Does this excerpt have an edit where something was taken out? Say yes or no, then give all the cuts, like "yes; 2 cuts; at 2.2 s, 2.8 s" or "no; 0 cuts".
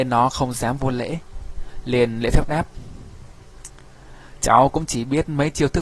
no; 0 cuts